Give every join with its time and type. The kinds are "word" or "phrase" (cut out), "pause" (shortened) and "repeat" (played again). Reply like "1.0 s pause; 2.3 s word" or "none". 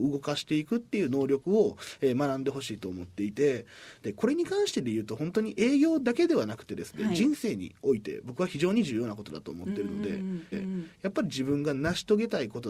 10.5 s repeat